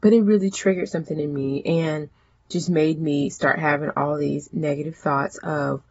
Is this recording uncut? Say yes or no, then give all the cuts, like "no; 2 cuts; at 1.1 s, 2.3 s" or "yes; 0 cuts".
yes; 0 cuts